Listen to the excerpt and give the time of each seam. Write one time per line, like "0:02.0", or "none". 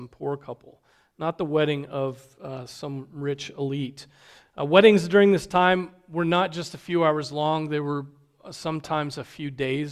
none